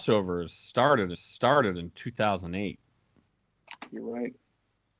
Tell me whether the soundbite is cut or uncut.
cut